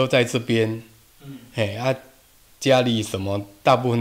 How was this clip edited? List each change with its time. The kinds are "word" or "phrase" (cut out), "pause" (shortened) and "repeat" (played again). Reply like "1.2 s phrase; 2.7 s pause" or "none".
none